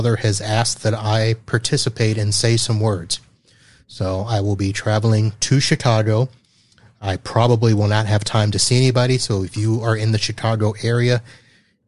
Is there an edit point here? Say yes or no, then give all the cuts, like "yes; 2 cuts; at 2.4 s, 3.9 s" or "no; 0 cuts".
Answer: no; 0 cuts